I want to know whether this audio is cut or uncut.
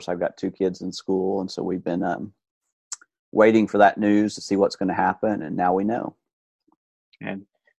uncut